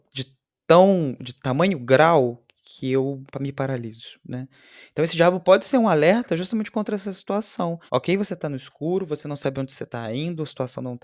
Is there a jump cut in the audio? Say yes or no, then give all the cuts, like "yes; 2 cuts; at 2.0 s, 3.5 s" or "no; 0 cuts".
yes; 2 cuts; at 3.3 s, 7.9 s